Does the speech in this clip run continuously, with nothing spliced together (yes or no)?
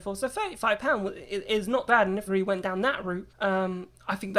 no